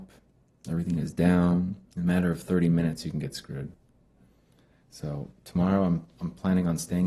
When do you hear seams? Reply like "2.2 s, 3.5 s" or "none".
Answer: 1.9 s, 5.4 s